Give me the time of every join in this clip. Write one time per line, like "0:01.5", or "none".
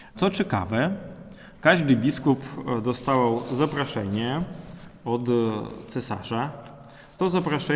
none